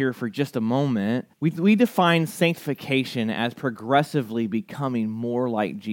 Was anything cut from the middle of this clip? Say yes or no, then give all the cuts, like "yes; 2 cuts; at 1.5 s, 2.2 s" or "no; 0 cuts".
yes; 1 cut; at 1.3 s